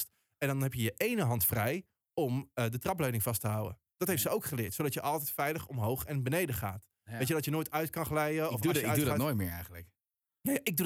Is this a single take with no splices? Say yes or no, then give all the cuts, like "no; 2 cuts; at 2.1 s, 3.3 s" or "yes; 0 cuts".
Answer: yes; 0 cuts